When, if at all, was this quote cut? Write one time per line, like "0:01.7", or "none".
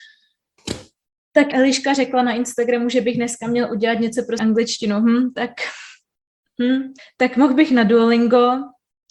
0:01.5
0:04.4
0:07.0